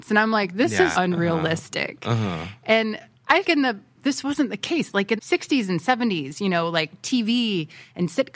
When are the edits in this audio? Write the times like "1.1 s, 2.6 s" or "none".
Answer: 0.9 s, 3.4 s, 4.0 s, 5.2 s